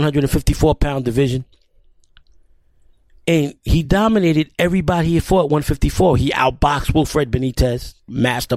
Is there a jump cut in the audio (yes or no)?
no